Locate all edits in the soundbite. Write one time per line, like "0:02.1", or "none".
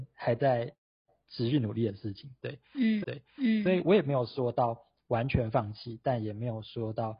0:03.0